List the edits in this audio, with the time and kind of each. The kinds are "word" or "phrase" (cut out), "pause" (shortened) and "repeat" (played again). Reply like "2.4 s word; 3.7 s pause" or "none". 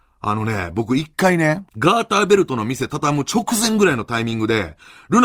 1.7 s pause